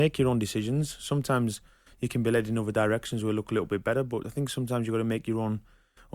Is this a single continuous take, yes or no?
yes